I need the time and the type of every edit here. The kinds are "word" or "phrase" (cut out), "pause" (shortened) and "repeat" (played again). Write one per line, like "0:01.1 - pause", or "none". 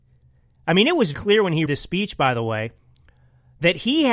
0:01.1 - word
0:01.7 - word